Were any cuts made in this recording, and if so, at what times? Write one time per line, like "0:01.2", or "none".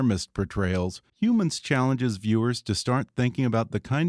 0:01.1

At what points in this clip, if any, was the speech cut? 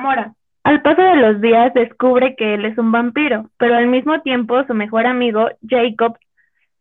0:03.5

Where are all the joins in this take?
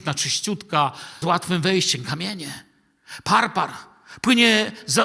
0:01.2

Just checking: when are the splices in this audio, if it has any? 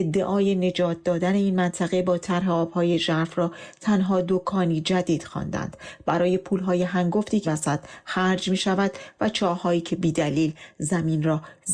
0:07.4

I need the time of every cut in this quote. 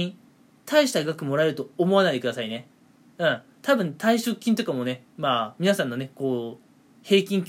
0:05.1

